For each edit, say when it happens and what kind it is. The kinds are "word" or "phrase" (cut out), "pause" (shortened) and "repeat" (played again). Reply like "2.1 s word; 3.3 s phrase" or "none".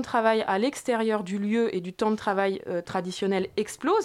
none